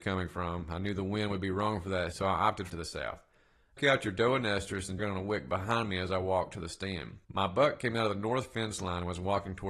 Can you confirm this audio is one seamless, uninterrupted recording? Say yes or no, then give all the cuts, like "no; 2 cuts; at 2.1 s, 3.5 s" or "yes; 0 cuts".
no; 5 cuts; at 2.1 s, 2.7 s, 3.8 s, 5.0 s, 7.2 s